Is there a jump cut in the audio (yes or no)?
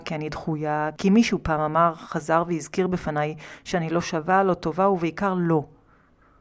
no